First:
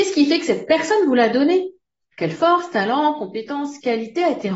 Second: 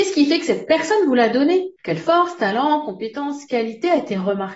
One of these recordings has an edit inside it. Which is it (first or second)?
second